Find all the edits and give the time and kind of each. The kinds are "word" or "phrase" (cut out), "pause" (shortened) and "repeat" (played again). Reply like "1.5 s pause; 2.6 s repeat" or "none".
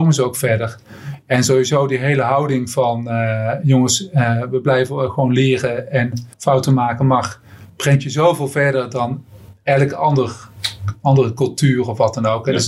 6.3 s pause